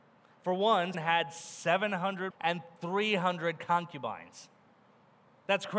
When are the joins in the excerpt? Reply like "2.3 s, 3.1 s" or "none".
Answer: 0.9 s, 2.3 s